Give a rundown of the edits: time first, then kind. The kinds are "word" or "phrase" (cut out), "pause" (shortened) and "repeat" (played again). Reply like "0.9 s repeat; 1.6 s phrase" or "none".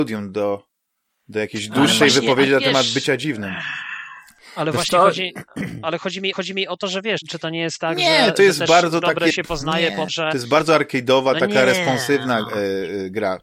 6.3 s repeat; 7.2 s word; 9.3 s word; 10.1 s word